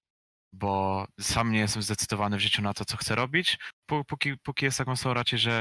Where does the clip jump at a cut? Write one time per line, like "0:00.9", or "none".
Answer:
0:01.1